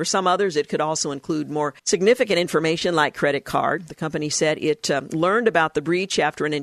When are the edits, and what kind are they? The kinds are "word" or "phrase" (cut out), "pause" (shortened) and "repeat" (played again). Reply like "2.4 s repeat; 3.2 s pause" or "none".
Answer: 1.8 s pause